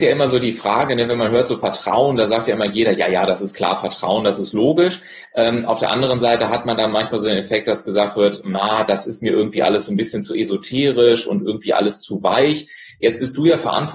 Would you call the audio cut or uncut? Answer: uncut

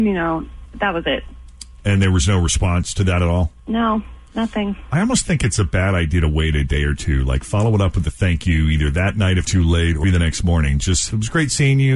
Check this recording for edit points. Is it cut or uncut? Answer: cut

